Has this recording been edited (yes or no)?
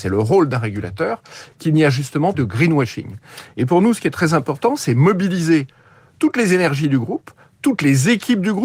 yes